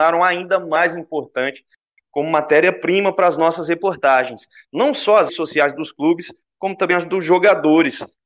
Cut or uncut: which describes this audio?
cut